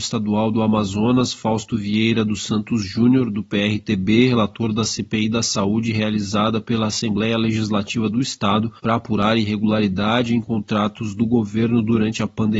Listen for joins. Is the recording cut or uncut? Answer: cut